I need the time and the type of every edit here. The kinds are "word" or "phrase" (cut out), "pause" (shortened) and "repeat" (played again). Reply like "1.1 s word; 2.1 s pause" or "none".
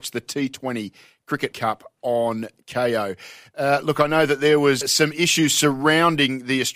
1.5 s word; 4.8 s word

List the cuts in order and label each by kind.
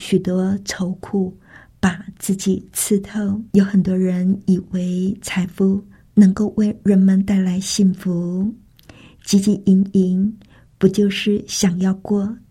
3.5 s pause

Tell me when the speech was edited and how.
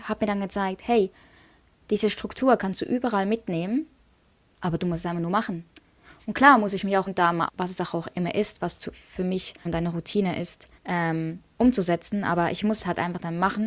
7.1 s word; 7.5 s word; 9.7 s phrase; 10.8 s pause

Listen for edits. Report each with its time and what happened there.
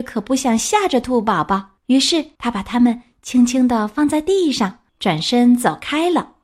1.8 s pause; 2.3 s pause; 4.9 s pause

